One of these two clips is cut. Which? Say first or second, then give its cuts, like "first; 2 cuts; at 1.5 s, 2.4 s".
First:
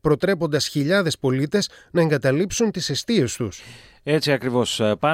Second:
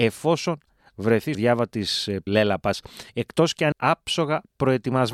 second; 4 cuts; at 1.3 s, 2.3 s, 3.1 s, 3.7 s